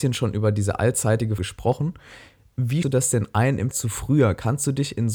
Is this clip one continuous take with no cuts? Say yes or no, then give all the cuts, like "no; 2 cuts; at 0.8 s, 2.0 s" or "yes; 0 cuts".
no; 3 cuts; at 1.4 s, 2.8 s, 3.7 s